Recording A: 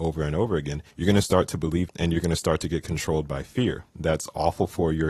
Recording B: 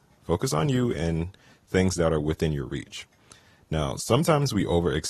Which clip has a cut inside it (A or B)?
A